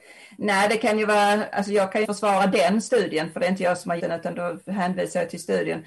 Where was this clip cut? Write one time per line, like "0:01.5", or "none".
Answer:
0:02.0
0:04.0
0:04.3